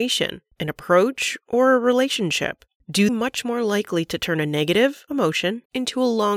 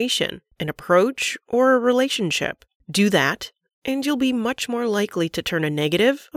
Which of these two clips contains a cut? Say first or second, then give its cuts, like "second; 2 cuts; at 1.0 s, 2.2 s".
first; 1 cut; at 3.1 s